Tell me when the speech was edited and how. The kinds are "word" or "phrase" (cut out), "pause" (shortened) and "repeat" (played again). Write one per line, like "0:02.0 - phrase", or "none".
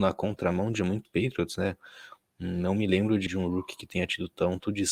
0:01.0 - phrase
0:03.3 - word